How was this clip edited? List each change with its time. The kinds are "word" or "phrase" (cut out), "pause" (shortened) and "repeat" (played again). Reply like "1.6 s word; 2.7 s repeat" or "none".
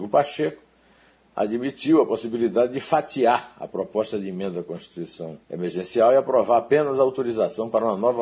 5.4 s pause